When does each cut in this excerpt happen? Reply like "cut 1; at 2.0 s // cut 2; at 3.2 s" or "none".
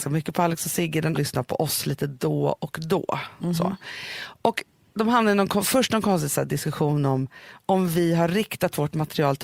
cut 1; at 1.1 s